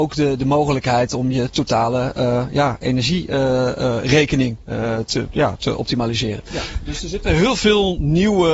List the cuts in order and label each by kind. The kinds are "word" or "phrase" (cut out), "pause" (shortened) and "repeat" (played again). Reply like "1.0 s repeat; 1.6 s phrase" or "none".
none